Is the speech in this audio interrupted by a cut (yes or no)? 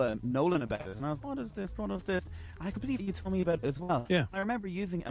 yes